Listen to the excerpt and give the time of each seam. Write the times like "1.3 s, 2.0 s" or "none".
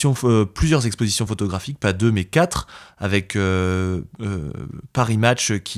none